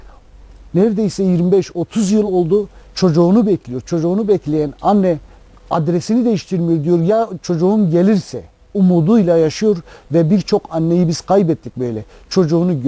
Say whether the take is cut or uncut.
uncut